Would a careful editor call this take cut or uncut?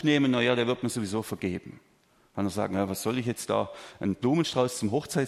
uncut